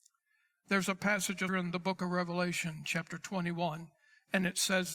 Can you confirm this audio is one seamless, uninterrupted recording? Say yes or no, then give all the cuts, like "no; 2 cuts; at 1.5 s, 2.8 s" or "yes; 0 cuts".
no; 1 cut; at 1.5 s